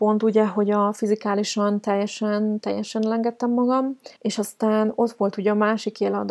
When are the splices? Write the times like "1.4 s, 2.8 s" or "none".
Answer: 4.2 s